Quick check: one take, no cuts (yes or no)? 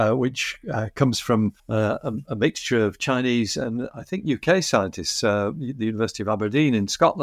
no